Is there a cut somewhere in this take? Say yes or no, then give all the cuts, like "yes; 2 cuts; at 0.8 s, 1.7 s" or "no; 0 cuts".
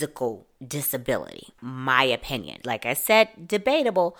yes; 1 cut; at 1.5 s